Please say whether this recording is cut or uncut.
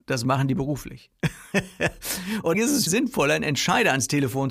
cut